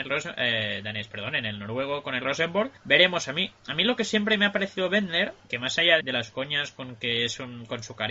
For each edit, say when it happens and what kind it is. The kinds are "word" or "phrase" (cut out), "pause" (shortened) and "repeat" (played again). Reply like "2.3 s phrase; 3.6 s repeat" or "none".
2.8 s pause; 5.4 s word; 6.0 s word